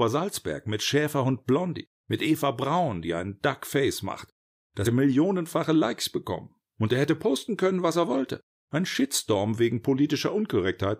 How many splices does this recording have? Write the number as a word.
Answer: three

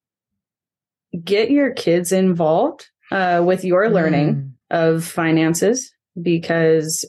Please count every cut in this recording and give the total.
two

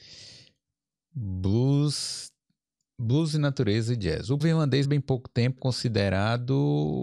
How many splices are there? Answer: three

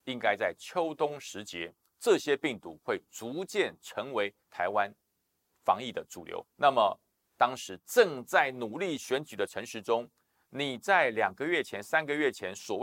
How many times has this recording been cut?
two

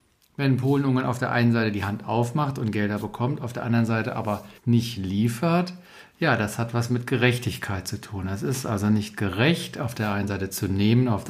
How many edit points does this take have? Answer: one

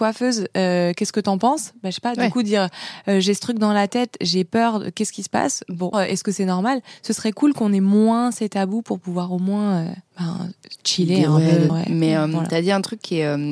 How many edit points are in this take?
three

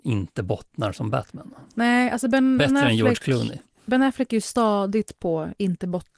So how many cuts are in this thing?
one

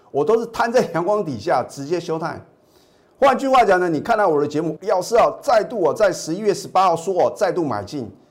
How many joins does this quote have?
one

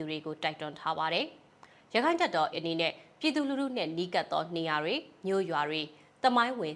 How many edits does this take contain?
one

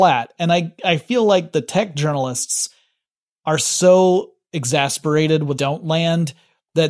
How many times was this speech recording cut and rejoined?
one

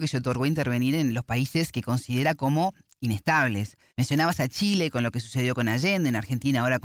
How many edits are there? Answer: one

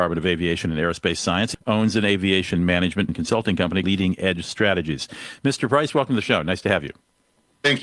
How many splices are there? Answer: three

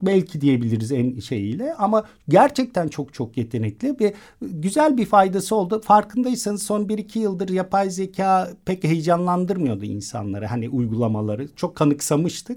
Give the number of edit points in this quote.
zero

